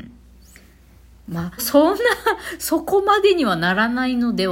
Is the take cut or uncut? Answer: cut